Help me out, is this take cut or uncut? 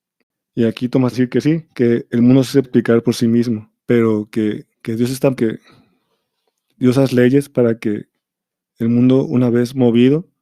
cut